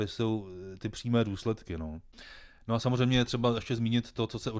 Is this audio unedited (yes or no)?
yes